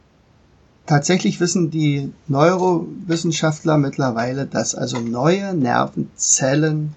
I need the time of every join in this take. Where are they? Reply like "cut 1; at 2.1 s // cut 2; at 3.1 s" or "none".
none